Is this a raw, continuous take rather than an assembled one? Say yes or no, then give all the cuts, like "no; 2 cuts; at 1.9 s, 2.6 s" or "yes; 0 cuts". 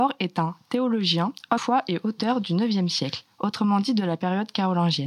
no; 1 cut; at 1.6 s